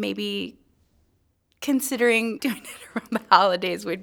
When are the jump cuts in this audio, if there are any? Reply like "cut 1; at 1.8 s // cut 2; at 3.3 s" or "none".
cut 1; at 2.4 s